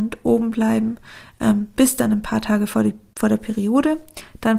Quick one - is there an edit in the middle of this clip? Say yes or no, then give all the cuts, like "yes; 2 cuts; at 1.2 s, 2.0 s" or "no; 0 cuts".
no; 0 cuts